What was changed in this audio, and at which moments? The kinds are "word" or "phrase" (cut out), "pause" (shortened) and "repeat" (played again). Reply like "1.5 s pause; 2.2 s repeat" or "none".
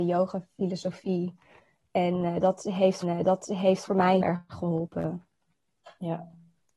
3.0 s repeat; 4.2 s word